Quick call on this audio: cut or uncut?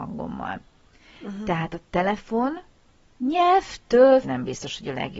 cut